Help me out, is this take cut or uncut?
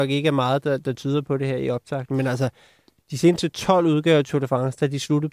uncut